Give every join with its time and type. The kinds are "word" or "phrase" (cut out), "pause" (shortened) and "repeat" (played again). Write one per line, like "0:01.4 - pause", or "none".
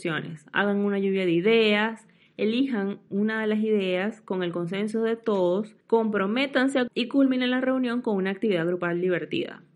0:03.1 - word
0:05.8 - pause
0:06.9 - word